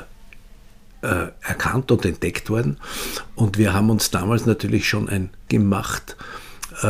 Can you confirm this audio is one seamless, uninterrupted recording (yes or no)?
no